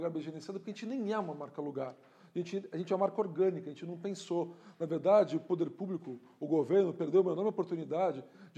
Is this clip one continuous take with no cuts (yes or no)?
yes